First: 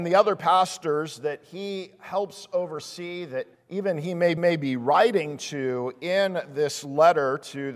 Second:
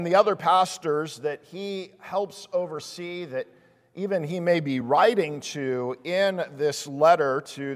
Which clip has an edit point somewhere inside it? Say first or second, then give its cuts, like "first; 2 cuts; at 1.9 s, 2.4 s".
first; 2 cuts; at 3.5 s, 4.4 s